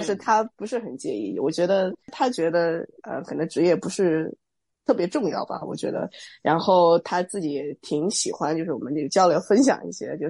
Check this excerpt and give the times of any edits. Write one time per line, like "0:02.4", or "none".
0:02.0